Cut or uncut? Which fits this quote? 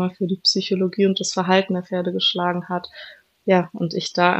uncut